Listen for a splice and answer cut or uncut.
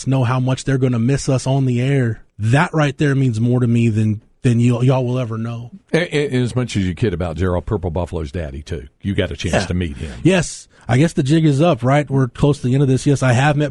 cut